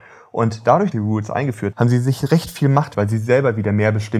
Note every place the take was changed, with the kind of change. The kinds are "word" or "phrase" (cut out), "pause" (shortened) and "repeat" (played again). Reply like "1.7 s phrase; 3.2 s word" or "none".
0.9 s phrase; 1.7 s word; 2.9 s phrase